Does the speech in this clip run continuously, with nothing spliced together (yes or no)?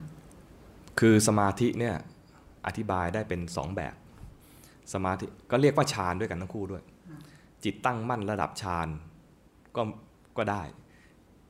yes